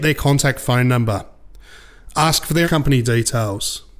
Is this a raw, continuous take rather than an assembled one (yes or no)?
no